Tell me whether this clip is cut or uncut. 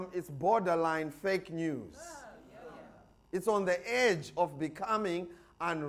uncut